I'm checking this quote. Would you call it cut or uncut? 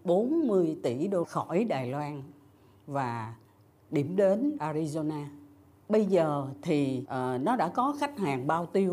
cut